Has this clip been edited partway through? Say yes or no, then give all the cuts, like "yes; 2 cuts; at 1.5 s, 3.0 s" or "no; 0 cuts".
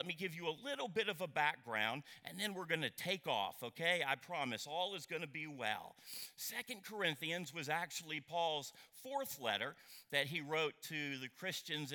no; 0 cuts